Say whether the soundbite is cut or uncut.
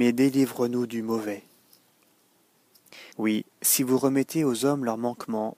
cut